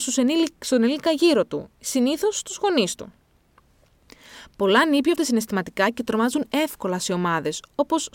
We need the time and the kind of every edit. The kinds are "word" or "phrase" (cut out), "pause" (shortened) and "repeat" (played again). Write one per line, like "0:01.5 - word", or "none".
0:05.2 - word